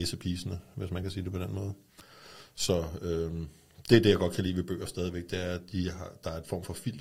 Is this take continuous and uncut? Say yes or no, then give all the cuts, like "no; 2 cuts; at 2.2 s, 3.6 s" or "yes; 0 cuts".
yes; 0 cuts